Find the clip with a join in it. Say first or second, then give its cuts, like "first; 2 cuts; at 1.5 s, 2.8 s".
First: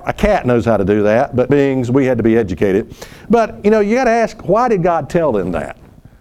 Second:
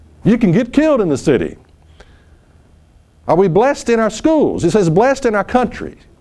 first; 1 cut; at 1.5 s